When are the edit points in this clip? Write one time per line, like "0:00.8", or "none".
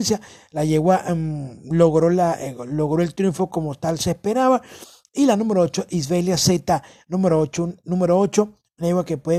none